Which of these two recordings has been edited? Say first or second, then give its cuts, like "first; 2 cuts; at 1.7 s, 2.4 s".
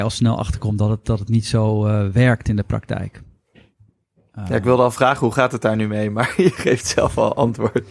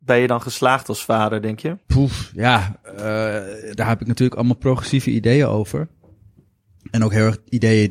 second; 1 cut; at 1.8 s